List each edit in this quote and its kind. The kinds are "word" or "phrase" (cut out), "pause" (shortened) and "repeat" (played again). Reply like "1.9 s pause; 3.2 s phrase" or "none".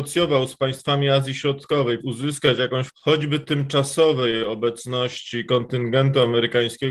2.0 s word; 2.9 s word